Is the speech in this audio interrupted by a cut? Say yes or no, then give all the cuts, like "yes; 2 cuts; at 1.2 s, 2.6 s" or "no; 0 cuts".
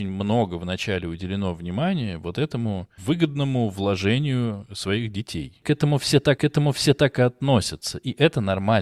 yes; 1 cut; at 6.4 s